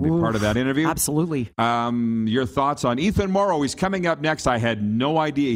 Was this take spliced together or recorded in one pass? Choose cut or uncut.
uncut